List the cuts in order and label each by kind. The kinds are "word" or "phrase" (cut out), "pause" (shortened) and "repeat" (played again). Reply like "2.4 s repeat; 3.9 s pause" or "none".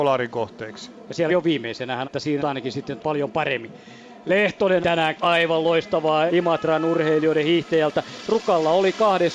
1.3 s word; 2.0 s word; 2.4 s word; 3.0 s word; 4.8 s word; 5.2 s word; 6.3 s word